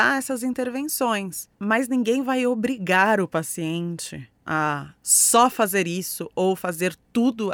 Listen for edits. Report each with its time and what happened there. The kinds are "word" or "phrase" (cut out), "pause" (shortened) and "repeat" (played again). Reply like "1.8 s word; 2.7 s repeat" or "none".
1.5 s pause; 4.4 s pause

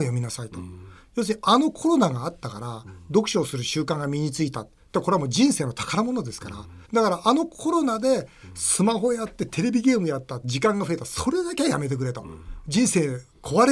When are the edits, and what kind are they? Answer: 6.8 s pause

